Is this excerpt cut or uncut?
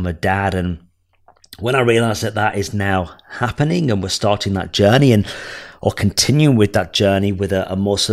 uncut